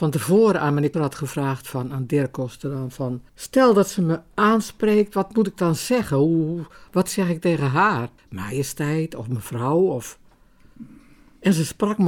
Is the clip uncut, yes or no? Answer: no